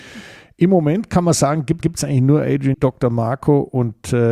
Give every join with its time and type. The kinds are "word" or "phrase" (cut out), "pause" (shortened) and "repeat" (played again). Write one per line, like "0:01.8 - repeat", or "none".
0:01.8 - repeat
0:02.7 - word